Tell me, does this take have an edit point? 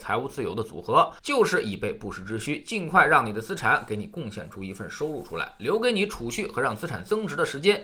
yes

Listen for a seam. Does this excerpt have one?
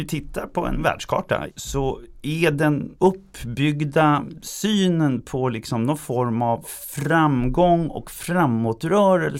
no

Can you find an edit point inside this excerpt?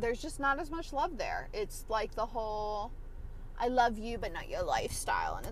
no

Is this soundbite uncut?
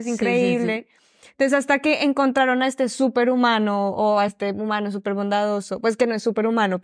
yes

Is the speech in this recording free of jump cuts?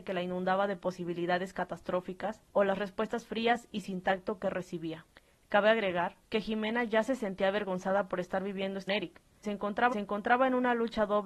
no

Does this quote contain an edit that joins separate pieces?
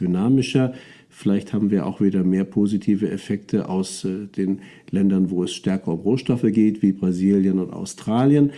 no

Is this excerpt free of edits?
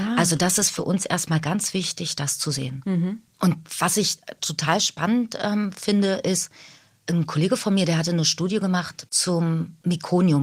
yes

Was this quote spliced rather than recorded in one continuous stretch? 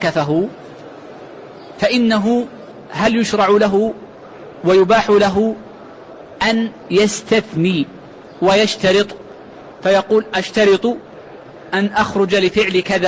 no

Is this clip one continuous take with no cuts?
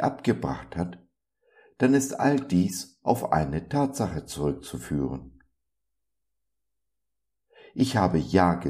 yes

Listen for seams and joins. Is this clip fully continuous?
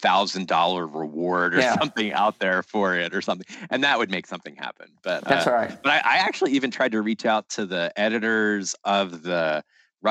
yes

